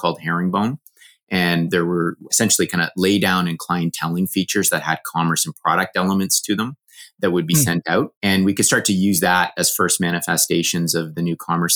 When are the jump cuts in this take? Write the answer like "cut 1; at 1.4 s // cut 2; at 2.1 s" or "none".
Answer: cut 1; at 8.2 s